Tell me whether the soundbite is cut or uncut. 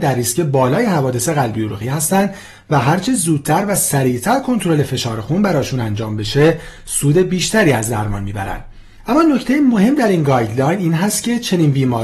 uncut